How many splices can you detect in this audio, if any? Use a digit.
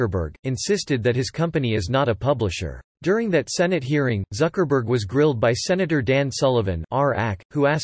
1